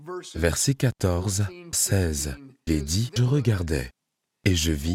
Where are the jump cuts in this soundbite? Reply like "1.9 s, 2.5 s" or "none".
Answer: 1.7 s, 2.7 s, 3.2 s